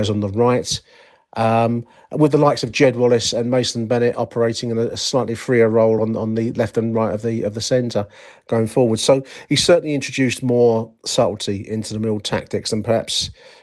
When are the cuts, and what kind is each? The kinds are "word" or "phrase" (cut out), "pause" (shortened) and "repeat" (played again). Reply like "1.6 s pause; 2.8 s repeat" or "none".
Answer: none

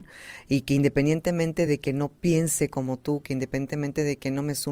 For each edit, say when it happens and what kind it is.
none

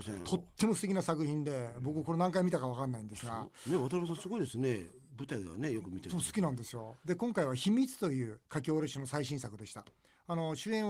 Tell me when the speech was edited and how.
8.4 s pause

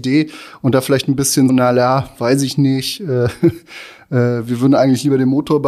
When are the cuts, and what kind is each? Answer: 1.5 s word

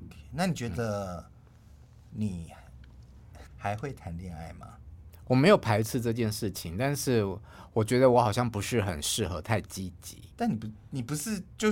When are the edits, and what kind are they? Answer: 3.5 s pause; 10.3 s pause

